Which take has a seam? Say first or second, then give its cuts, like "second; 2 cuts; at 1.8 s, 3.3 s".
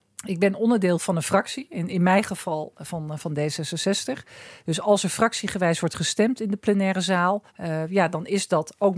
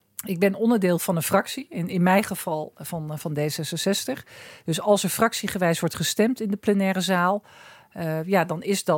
first; 1 cut; at 7.5 s